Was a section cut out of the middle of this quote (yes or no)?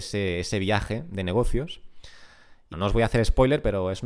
yes